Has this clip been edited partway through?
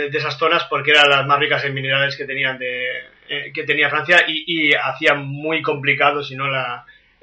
no; 0 cuts

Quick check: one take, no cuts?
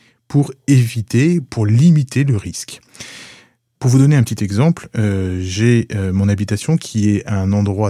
yes; 0 cuts

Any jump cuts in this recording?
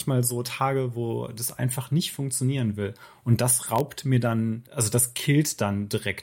no; 0 cuts

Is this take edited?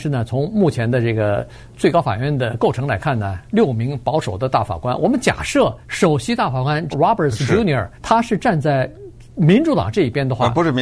yes; 3 cuts; at 5.8 s, 6.9 s, 7.9 s

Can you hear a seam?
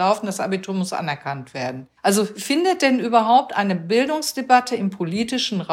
yes; 1 cut; at 2.0 s

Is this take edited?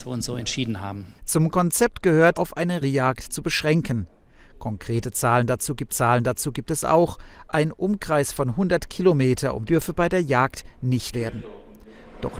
yes; 6 cuts; at 1.2 s, 2.3 s, 2.8 s, 5.9 s, 9.6 s, 11.1 s

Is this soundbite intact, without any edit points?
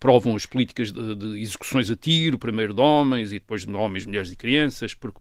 yes; 0 cuts

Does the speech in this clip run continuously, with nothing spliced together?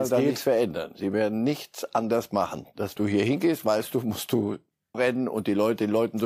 no; 2 cuts; at 3.0 s, 4.9 s

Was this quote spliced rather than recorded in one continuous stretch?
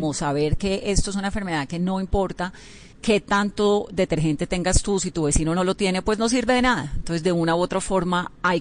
yes; 1 cut; at 2.9 s

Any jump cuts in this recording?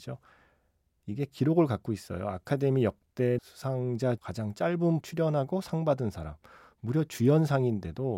yes; 3 cuts; at 3.4 s, 4.2 s, 5.0 s

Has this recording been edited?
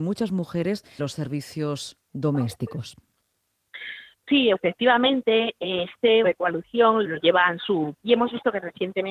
yes; 5 cuts; at 1.0 s, 4.5 s, 6.2 s, 7.0 s, 7.9 s

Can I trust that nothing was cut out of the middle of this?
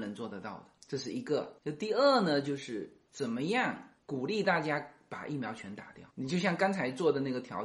no; 1 cut; at 3.0 s

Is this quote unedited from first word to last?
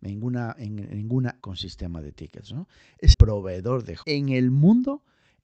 no; 3 cuts; at 1.4 s, 3.1 s, 4.0 s

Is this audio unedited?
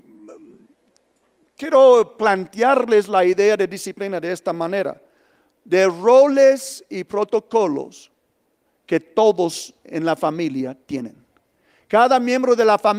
yes; 0 cuts

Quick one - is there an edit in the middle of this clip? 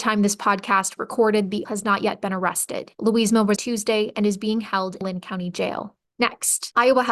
yes; 4 cuts; at 1.0 s, 1.6 s, 3.6 s, 5.0 s

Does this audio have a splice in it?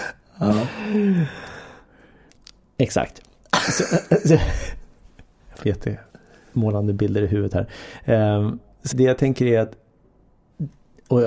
yes; 2 cuts; at 5.6 s, 8.9 s

